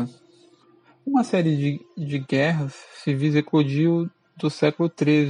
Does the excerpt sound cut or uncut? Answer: uncut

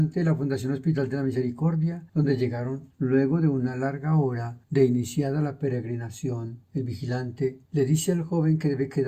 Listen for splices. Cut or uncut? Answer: cut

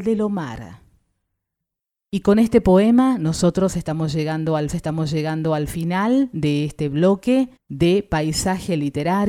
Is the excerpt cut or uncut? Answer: cut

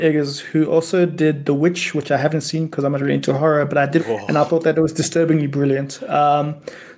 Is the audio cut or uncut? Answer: cut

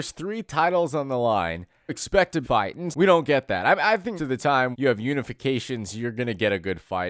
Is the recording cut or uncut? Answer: cut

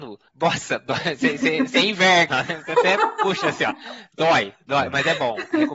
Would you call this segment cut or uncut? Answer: cut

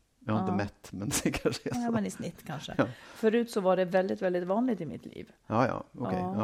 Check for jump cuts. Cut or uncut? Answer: uncut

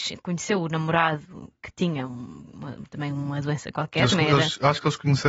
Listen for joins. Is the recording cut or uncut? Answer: uncut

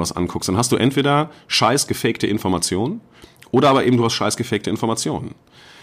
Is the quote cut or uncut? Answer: uncut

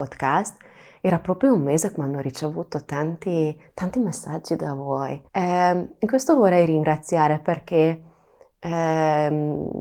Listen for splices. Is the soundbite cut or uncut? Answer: cut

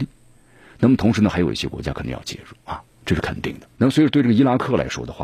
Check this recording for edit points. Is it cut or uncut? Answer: cut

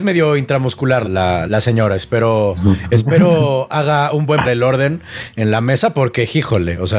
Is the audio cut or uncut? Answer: cut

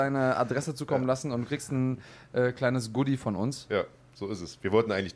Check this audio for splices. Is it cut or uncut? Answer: uncut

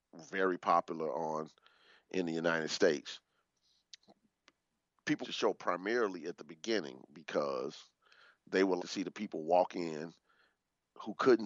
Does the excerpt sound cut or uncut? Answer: cut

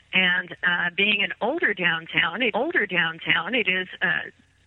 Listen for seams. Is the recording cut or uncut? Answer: cut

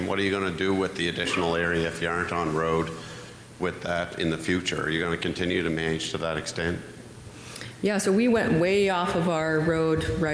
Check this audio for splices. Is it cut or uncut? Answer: uncut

